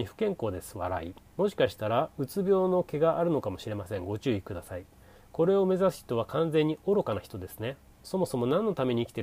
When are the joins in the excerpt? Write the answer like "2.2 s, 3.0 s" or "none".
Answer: 1.3 s

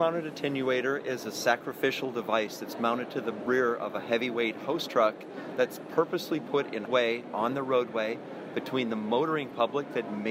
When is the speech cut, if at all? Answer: 6.9 s

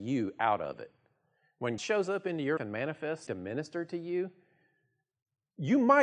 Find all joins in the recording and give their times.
1.8 s, 2.6 s, 3.3 s

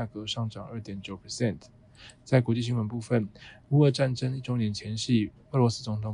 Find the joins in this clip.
none

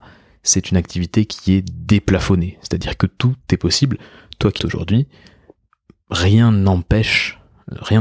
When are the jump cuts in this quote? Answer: 4.6 s

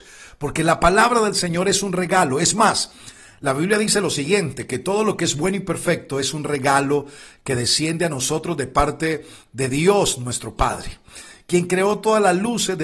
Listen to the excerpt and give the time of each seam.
none

